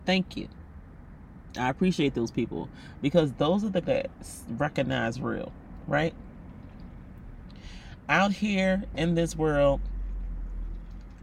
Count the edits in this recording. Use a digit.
1